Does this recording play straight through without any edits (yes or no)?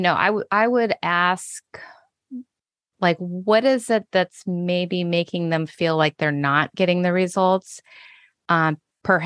yes